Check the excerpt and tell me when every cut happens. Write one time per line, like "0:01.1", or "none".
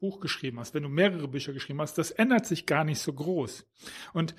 none